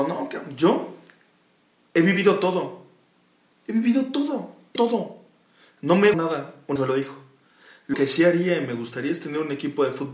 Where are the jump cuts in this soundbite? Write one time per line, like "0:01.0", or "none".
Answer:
0:04.8
0:06.1
0:06.8
0:07.9